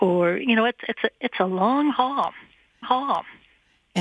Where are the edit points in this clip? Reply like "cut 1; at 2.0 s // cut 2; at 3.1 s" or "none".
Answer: cut 1; at 2.8 s